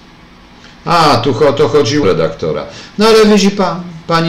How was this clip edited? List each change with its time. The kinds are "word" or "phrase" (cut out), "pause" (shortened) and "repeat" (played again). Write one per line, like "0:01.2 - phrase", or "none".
0:02.0 - phrase